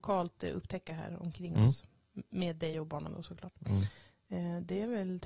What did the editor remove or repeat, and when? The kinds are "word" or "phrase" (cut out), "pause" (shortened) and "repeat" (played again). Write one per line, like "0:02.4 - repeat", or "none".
none